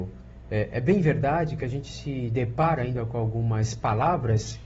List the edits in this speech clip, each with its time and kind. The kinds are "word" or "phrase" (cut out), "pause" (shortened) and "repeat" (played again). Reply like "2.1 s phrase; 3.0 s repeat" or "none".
none